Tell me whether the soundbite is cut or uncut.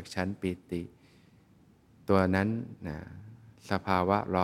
uncut